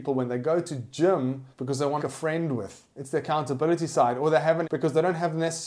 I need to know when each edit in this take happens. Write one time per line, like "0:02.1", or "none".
0:01.5
0:02.0
0:02.9
0:04.6